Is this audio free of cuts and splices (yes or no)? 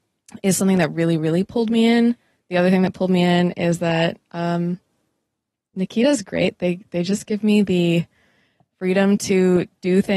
yes